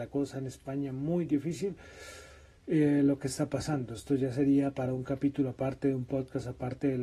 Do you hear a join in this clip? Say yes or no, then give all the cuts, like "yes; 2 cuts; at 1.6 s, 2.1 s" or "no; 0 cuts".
no; 0 cuts